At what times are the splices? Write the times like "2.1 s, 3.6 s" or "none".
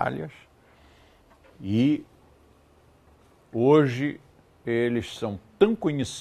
none